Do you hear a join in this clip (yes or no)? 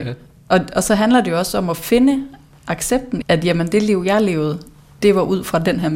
yes